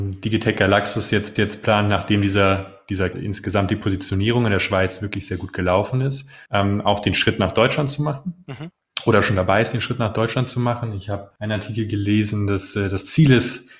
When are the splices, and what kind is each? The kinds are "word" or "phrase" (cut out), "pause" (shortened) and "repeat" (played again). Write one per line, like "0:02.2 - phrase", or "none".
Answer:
0:01.4 - repeat
0:03.1 - phrase
0:06.5 - pause